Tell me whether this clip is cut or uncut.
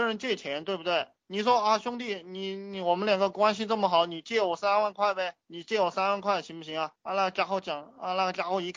cut